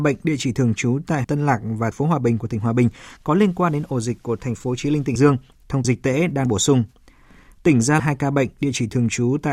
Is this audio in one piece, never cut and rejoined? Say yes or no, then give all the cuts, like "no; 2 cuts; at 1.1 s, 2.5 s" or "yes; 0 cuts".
no; 6 cuts; at 1.2 s, 1.9 s, 5.2 s, 5.8 s, 6.5 s, 8.0 s